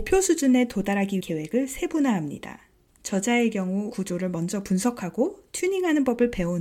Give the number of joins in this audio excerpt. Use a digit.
2